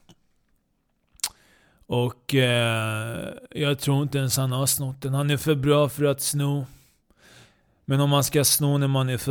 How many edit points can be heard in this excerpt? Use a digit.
0